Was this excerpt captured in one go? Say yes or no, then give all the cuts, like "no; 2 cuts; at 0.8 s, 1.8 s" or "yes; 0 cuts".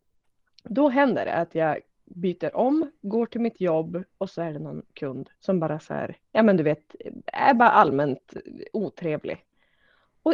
no; 2 cuts; at 5.3 s, 6.2 s